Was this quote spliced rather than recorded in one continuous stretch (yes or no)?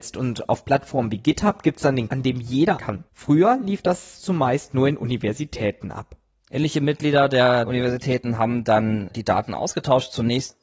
yes